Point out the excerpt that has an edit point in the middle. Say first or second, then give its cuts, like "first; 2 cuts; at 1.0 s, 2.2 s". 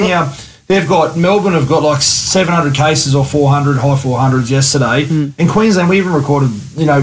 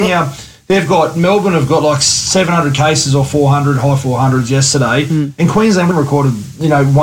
second; 1 cut; at 5.9 s